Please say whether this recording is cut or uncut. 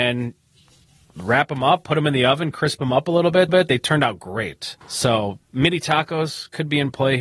cut